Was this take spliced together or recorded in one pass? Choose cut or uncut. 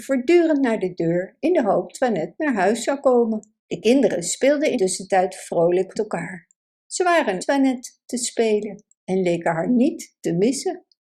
cut